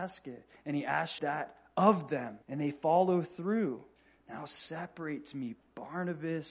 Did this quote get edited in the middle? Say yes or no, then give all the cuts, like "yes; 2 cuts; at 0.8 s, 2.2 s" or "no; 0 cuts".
yes; 3 cuts; at 1.2 s, 2.4 s, 4.0 s